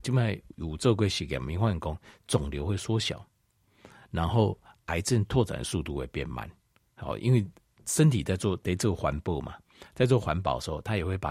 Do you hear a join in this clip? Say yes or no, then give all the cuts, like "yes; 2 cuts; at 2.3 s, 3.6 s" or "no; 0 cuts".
no; 0 cuts